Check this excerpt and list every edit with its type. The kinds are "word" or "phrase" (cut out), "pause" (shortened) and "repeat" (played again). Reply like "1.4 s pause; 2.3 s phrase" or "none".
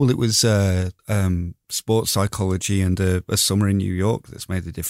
1.0 s pause